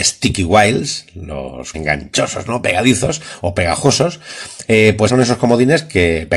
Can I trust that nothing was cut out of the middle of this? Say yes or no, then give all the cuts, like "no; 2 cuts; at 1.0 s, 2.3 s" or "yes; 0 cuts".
no; 2 cuts; at 1.7 s, 5.1 s